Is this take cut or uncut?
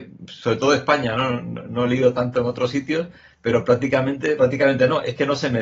cut